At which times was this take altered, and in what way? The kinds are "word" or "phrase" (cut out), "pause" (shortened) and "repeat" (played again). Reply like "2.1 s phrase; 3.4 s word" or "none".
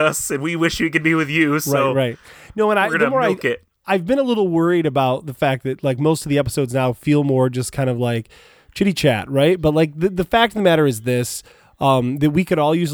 none